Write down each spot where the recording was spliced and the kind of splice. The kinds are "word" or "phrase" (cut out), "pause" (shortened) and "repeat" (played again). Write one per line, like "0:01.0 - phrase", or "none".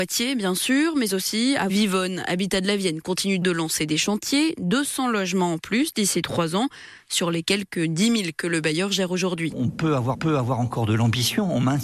0:01.7 - phrase
0:03.4 - word
0:10.1 - repeat